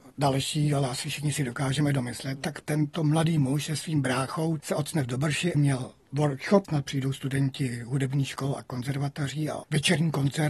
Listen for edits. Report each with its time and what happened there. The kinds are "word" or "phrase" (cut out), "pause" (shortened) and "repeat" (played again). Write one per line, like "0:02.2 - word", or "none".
0:02.6 - word
0:04.6 - word
0:05.5 - word
0:06.6 - phrase